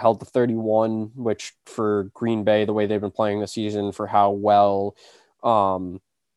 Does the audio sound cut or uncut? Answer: uncut